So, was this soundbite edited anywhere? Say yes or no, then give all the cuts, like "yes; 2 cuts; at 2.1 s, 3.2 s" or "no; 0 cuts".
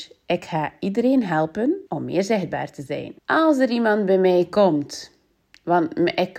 yes; 2 cuts; at 1.9 s, 3.2 s